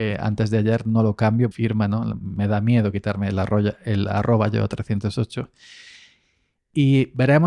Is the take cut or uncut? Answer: cut